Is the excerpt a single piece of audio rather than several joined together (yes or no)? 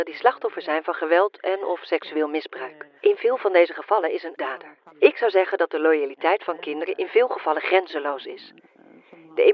no